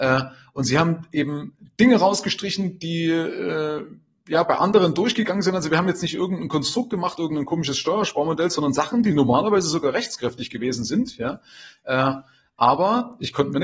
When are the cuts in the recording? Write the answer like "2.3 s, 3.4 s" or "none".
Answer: none